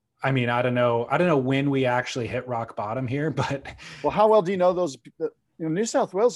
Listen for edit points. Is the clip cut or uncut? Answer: uncut